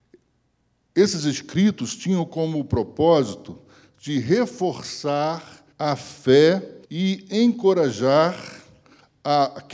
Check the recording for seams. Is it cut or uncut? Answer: cut